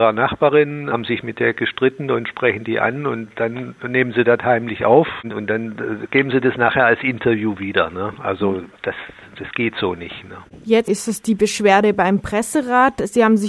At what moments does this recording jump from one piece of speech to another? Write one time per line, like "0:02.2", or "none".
0:08.8
0:10.9